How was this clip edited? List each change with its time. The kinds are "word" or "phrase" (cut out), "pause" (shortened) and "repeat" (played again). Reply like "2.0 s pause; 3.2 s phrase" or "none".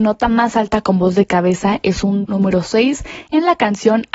2.2 s word

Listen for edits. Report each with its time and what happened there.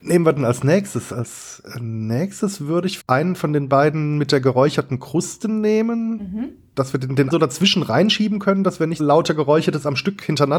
3.0 s word; 7.3 s word; 9.0 s word

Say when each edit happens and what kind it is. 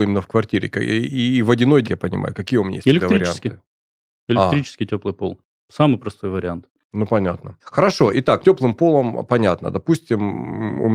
1.8 s phrase; 7.6 s pause; 8.4 s phrase

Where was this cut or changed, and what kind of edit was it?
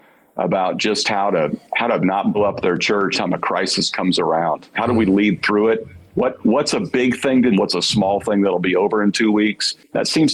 1.6 s pause; 2.3 s word; 3.1 s word; 7.5 s phrase

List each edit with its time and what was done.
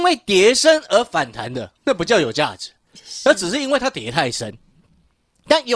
1.8 s pause

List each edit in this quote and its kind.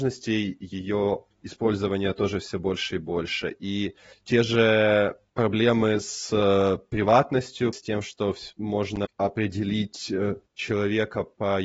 1.3 s pause; 4.1 s pause; 7.7 s word; 10.5 s pause

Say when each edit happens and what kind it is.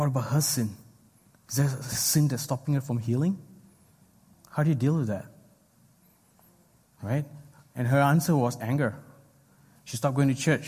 none

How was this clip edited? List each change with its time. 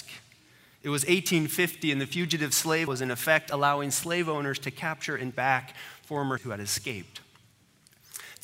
2.9 s word; 5.3 s word; 6.4 s word

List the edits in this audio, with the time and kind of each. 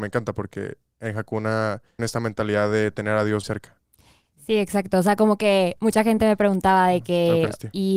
2.0 s word; 3.4 s word

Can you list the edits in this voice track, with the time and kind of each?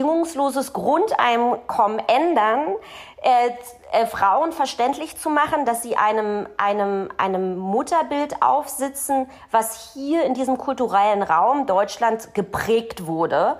none

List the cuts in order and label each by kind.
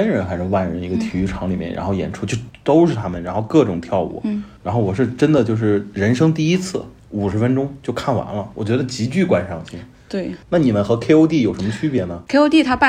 7.0 s pause; 10.4 s pause

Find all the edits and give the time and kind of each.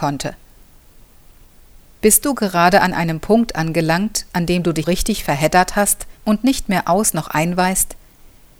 4.8 s word; 6.2 s pause

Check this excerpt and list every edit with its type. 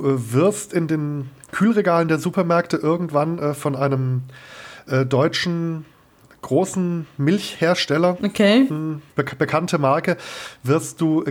9.1 s pause

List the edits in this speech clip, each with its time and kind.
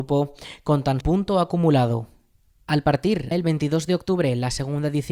1.0 s phrase; 3.3 s word

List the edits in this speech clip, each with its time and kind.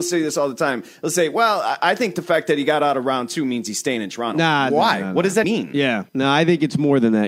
5.4 s word; 6.1 s pause

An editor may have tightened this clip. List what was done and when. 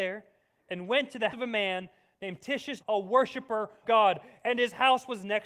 1.3 s word; 2.8 s word; 3.8 s word

